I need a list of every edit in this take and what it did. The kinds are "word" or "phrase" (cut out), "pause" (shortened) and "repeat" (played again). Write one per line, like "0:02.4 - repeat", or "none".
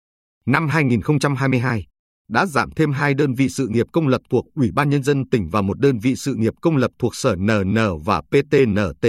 none